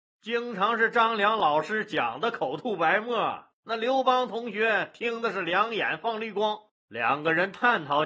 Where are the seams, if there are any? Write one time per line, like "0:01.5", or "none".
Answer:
0:06.7